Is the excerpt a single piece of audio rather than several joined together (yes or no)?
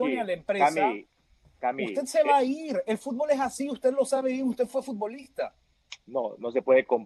yes